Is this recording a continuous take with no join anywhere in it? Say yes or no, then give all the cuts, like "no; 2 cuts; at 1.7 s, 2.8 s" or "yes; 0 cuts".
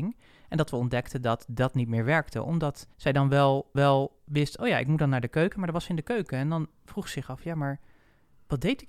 no; 2 cuts; at 2.9 s, 3.7 s